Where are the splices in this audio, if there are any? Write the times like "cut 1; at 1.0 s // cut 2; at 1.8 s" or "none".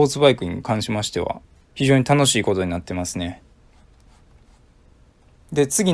none